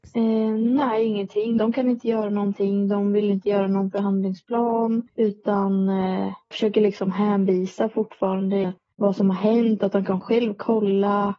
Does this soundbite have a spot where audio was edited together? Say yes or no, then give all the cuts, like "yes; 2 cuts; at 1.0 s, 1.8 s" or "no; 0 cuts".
yes; 3 cuts; at 1.6 s, 6.5 s, 8.6 s